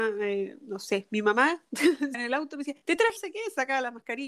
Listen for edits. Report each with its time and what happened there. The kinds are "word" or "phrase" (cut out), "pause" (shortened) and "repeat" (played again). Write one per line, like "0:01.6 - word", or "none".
0:02.1 - word
0:02.8 - pause
0:03.2 - phrase